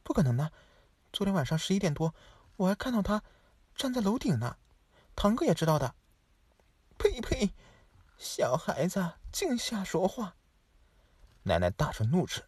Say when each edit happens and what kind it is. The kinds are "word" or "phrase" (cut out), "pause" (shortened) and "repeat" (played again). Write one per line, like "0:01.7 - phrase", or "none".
none

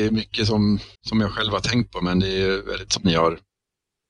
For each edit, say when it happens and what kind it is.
0:00.9 - pause
0:02.9 - phrase

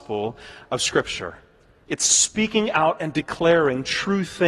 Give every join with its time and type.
none

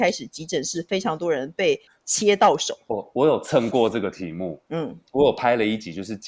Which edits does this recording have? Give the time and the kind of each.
none

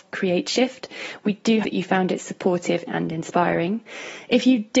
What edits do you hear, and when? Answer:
0:01.6 - word
0:02.9 - word

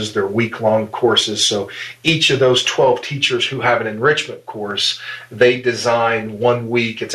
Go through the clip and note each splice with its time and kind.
none

